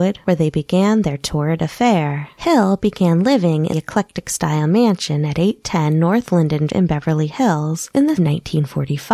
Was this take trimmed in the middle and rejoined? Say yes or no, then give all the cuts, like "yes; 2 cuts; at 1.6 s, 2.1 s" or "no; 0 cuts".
yes; 3 cuts; at 3.7 s, 6.7 s, 8.2 s